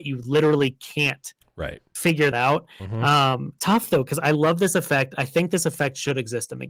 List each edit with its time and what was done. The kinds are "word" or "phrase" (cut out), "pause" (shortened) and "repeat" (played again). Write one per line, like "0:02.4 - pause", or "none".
0:02.3 - word
0:03.6 - word